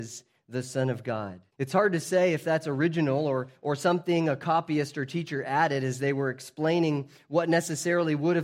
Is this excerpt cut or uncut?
cut